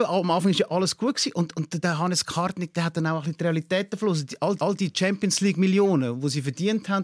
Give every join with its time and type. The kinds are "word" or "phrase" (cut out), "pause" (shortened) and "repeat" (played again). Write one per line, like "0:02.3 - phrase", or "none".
0:01.8 - word
0:04.6 - repeat